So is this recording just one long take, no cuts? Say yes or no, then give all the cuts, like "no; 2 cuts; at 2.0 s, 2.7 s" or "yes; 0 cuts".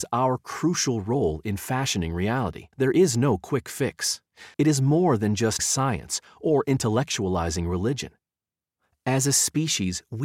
no; 3 cuts; at 2.7 s, 4.5 s, 5.6 s